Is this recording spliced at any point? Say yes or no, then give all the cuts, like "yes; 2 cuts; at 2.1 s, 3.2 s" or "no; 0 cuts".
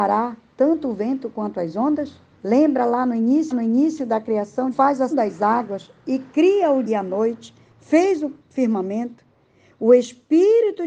yes; 5 cuts; at 2.3 s, 3.5 s, 4.7 s, 5.1 s, 6.9 s